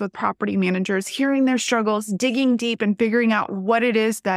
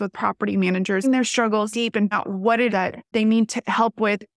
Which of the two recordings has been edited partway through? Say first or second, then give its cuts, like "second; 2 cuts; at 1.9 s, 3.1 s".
second; 5 cuts; at 1.0 s, 1.7 s, 2.1 s, 2.7 s, 3.1 s